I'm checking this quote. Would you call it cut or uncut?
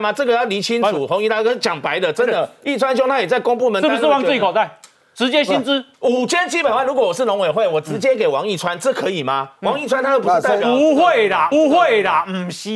cut